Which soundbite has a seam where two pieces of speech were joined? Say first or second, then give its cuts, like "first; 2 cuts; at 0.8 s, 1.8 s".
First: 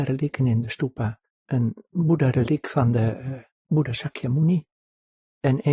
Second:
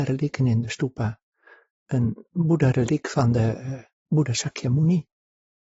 first; 1 cut; at 1.2 s